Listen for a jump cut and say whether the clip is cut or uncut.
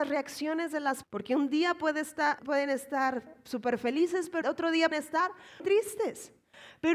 cut